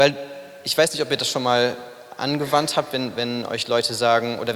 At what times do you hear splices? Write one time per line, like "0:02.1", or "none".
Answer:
none